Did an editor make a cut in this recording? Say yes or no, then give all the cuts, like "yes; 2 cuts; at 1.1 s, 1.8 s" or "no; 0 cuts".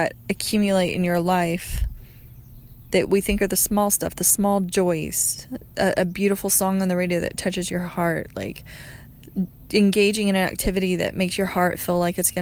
no; 0 cuts